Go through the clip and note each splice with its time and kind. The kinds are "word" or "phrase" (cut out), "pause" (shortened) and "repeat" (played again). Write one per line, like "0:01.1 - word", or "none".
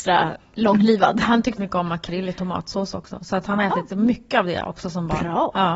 0:01.6 - word